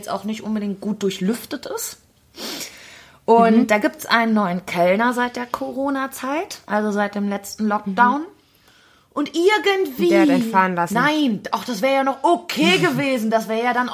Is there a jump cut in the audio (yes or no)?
no